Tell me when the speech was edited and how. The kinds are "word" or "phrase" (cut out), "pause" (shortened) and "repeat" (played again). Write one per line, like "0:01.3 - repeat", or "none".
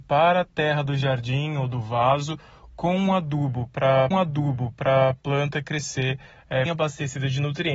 0:04.1 - repeat
0:06.7 - word